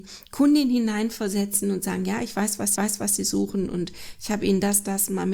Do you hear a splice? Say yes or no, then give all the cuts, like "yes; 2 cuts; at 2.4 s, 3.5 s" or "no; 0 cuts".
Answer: yes; 1 cut; at 2.8 s